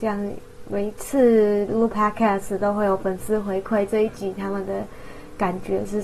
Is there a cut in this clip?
no; 0 cuts

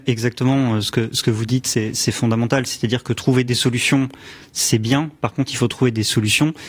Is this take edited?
no; 0 cuts

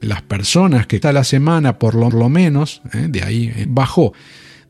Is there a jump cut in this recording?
yes; 3 cuts; at 1.0 s, 2.1 s, 3.6 s

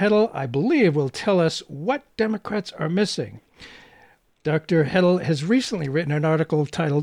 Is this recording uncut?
yes; 0 cuts

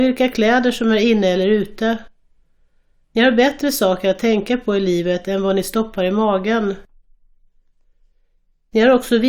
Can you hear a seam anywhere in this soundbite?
no; 0 cuts

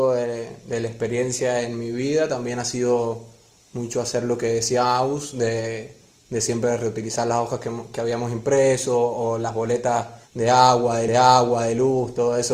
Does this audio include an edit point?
yes; 2 cuts; at 10.3 s, 11.1 s

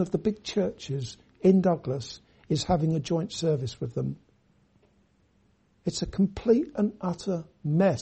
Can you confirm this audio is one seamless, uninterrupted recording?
yes; 0 cuts

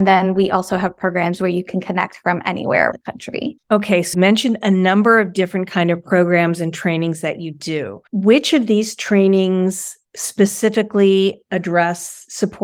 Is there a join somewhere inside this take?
yes; 4 cuts; at 2.9 s, 3.6 s, 4.1 s, 8.1 s

